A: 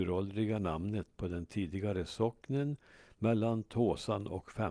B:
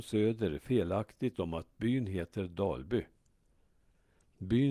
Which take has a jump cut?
B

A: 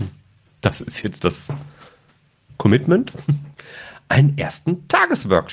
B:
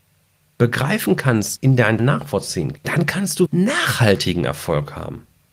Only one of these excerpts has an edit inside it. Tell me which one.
B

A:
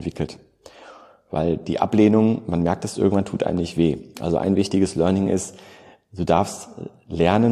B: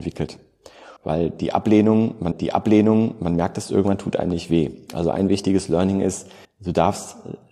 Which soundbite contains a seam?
B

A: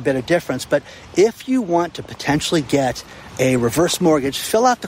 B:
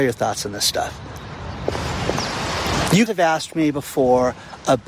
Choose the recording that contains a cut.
B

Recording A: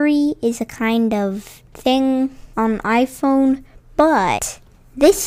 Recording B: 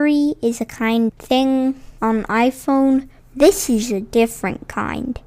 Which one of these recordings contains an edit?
B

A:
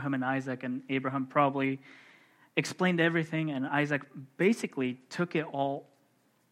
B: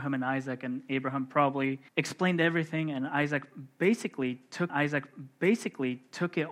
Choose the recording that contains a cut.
B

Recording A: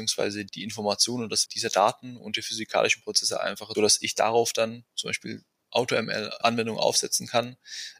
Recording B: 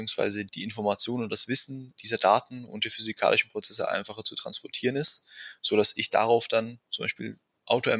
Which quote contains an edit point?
A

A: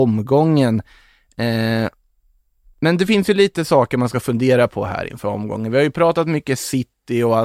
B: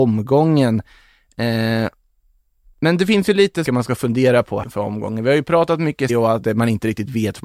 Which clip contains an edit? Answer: B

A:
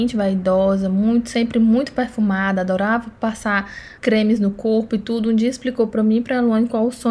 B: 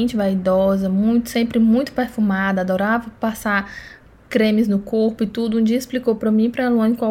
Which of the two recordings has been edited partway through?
A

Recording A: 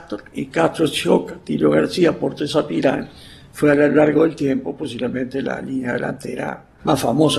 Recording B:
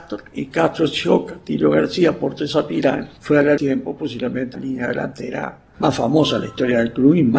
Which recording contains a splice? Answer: B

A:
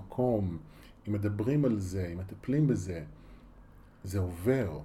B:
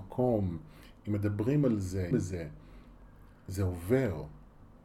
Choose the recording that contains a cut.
B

